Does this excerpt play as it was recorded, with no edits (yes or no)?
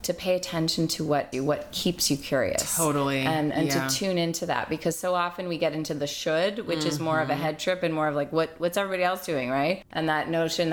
no